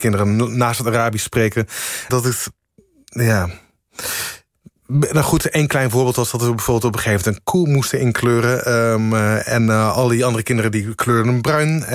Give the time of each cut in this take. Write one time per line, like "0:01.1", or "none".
0:02.1